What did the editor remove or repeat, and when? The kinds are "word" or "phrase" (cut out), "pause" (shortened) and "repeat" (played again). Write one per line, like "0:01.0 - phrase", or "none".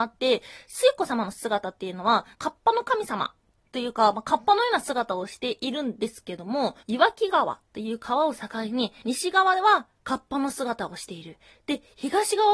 0:02.3 - phrase
0:06.8 - pause